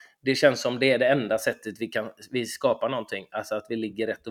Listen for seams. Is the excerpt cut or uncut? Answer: uncut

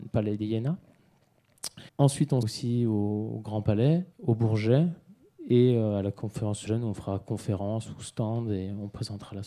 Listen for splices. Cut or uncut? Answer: cut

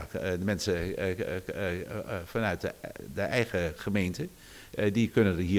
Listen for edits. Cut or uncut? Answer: uncut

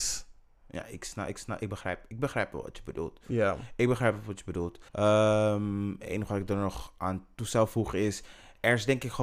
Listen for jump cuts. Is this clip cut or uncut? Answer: cut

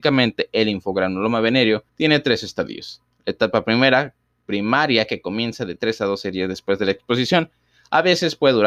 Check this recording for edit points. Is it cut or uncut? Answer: cut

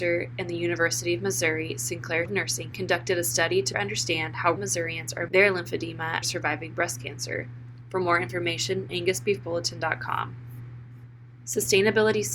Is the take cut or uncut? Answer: cut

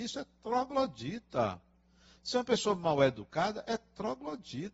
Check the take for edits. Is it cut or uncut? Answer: uncut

